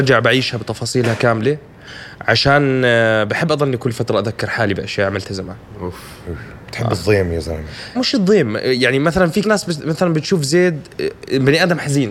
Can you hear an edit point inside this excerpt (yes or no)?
yes